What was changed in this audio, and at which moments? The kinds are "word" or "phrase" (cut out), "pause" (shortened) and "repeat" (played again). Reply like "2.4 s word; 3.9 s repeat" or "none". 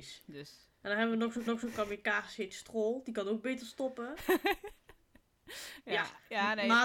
1.5 s repeat